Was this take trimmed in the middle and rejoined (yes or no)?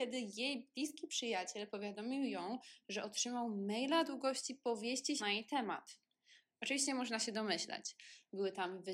yes